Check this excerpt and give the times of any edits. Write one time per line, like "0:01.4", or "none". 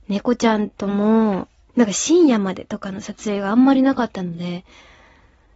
0:01.6